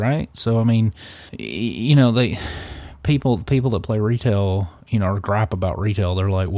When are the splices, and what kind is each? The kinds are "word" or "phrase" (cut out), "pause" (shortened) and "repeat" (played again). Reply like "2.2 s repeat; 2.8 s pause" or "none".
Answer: 1.3 s pause; 4.8 s pause